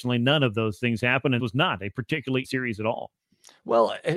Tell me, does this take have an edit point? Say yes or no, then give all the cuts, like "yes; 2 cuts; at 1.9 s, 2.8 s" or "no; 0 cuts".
yes; 2 cuts; at 1.4 s, 2.4 s